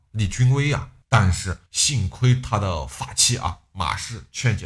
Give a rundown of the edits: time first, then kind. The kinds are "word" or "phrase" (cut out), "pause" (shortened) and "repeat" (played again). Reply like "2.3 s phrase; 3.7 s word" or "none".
1.0 s pause; 1.7 s pause